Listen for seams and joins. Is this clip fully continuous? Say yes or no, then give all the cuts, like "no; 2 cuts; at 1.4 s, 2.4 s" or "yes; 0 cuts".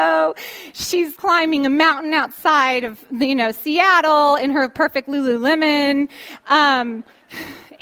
no; 1 cut; at 1.2 s